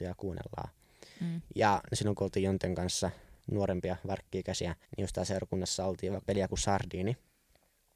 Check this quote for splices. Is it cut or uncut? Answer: cut